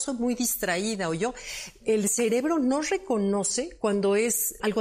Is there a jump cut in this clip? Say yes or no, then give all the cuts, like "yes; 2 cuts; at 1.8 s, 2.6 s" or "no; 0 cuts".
no; 0 cuts